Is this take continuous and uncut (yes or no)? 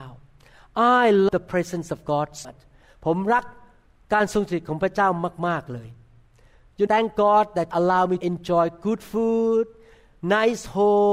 no